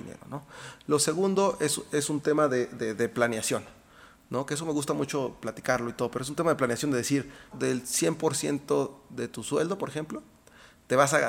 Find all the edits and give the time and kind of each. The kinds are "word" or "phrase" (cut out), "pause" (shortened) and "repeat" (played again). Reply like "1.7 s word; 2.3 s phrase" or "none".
7.5 s word